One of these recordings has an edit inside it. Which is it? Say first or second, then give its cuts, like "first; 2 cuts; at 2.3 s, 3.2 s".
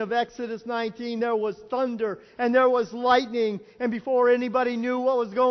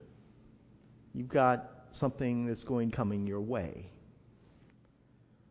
second; 1 cut; at 2.9 s